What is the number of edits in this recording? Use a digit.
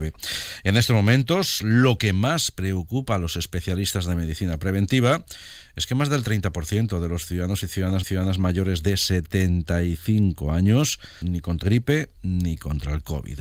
4